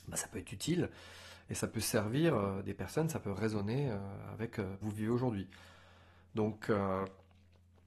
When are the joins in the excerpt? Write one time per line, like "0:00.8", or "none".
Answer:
0:04.8